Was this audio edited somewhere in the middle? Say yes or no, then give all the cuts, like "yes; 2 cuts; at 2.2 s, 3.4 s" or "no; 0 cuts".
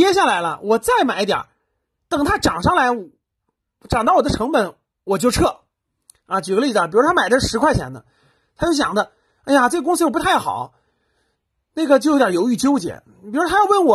no; 0 cuts